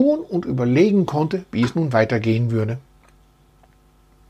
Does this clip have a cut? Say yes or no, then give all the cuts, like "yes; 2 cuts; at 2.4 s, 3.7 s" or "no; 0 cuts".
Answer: no; 0 cuts